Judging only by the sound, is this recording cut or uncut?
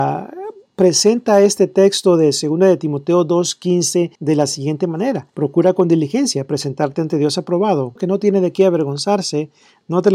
cut